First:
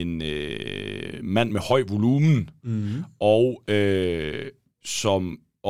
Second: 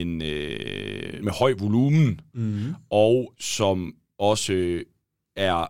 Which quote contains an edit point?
second; 2 cuts; at 1.2 s, 3.3 s

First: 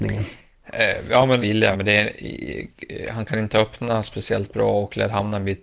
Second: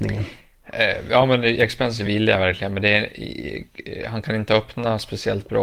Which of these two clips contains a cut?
first; 2 cuts; at 1.4 s, 1.7 s

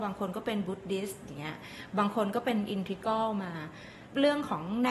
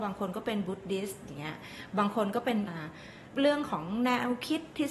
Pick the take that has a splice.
second; 1 cut; at 2.7 s

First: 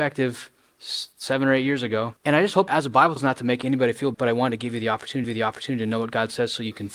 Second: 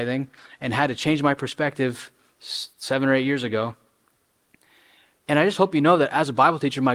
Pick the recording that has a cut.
first; 5 cuts; at 2.2 s, 2.7 s, 3.2 s, 4.1 s, 5.2 s

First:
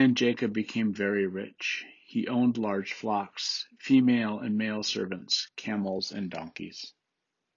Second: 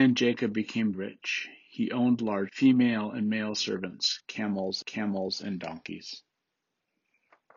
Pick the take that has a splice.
second; 3 cuts; at 0.9 s, 2.5 s, 4.8 s

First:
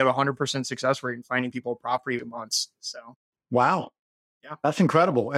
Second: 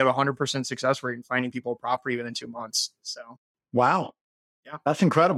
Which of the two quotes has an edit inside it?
first; 1 cut; at 2.2 s

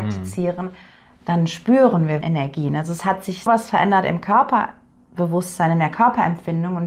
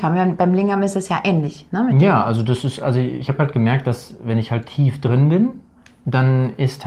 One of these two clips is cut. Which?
first; 2 cuts; at 2.2 s, 3.5 s

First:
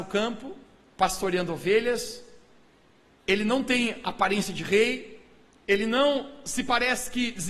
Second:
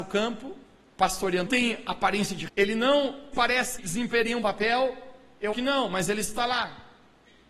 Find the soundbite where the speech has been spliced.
second; 6 cuts; at 1.5 s, 2.5 s, 3.3 s, 3.8 s, 4.4 s, 5.5 s

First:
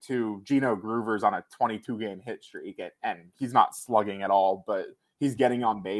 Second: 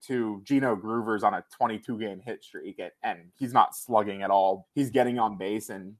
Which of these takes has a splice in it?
second; 1 cut; at 4.6 s

